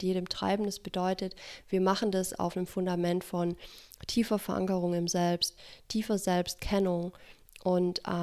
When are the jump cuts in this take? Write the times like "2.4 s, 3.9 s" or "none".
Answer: none